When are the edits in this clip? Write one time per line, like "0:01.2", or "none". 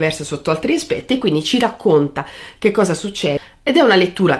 none